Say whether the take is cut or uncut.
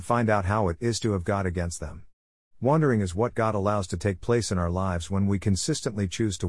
uncut